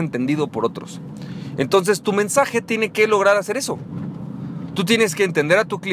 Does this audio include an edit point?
no; 0 cuts

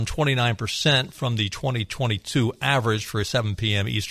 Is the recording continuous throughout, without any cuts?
yes; 0 cuts

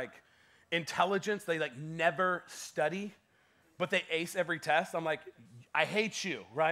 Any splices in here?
no; 0 cuts

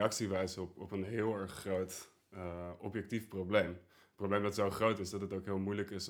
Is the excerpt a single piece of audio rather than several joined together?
yes; 0 cuts

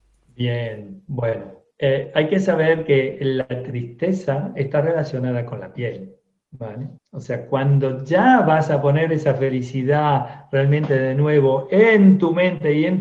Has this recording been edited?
yes; 2 cuts; at 1.7 s, 7.0 s

